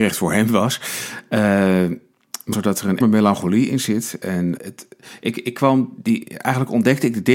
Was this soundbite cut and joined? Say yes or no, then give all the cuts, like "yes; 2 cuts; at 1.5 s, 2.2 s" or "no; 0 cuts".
yes; 3 cuts; at 2.5 s, 3.0 s, 4.6 s